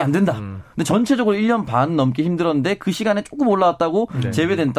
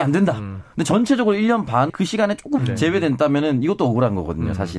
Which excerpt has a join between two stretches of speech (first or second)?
second